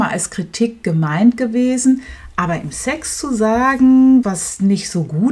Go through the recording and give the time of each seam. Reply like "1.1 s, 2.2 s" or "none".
4.2 s

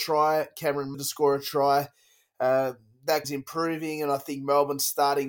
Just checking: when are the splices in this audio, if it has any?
0.9 s, 3.2 s

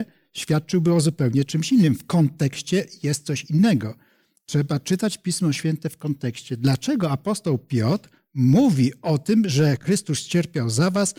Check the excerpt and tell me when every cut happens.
none

